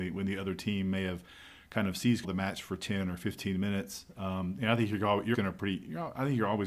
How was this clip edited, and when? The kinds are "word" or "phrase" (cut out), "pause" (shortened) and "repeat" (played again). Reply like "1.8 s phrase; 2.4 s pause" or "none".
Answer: 2.2 s word; 5.3 s word

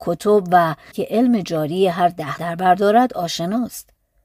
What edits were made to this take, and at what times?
0.9 s word; 2.4 s phrase

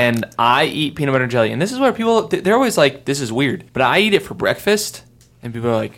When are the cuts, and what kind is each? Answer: 3.7 s pause

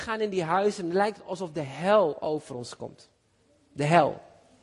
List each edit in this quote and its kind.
none

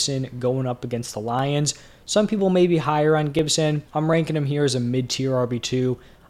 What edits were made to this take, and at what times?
3.9 s pause

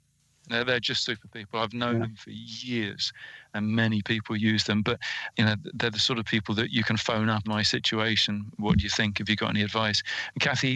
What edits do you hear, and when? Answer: 5.3 s word; 7.4 s phrase

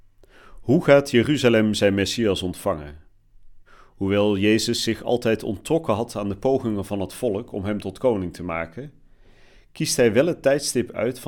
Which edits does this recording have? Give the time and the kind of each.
3.7 s pause

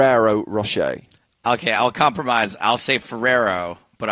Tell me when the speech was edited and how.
none

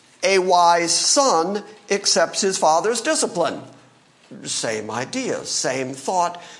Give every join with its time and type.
none

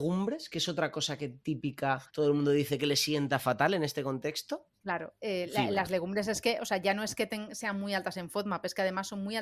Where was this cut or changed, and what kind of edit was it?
2.1 s pause; 5.2 s pause

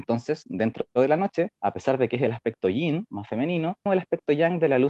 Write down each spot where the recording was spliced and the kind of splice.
1.5 s pause; 3.9 s word

